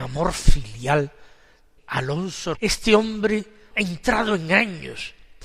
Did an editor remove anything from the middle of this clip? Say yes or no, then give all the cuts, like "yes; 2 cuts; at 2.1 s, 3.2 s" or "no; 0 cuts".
yes; 3 cuts; at 1.8 s, 2.5 s, 3.7 s